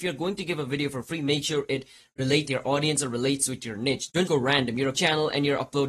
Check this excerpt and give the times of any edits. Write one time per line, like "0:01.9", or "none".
0:02.4
0:04.3
0:04.9